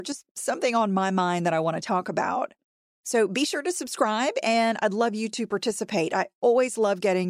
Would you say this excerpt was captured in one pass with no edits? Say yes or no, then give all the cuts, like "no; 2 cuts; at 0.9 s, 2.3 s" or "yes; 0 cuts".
yes; 0 cuts